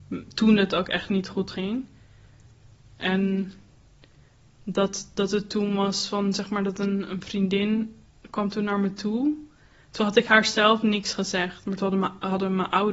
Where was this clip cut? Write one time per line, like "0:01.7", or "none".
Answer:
none